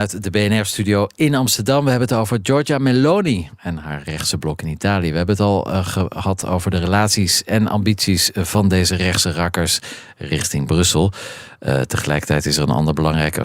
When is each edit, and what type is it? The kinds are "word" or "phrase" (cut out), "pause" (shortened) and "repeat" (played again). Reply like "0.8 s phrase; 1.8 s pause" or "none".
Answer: none